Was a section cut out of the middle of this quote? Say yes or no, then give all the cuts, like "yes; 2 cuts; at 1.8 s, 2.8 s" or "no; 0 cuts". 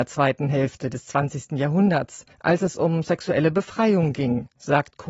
yes; 1 cut; at 2.3 s